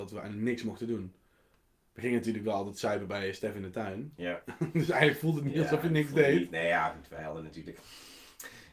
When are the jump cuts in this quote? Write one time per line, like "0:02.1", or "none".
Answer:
none